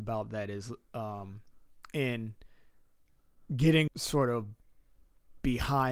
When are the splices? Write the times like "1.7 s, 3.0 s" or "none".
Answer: 3.9 s